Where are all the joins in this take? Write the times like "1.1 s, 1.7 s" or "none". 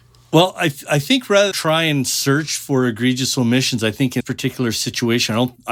1.5 s, 4.2 s